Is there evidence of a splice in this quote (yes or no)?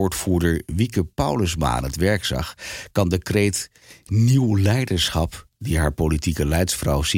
no